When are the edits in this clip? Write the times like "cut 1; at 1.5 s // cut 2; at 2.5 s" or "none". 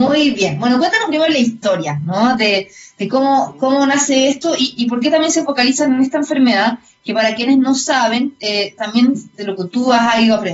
none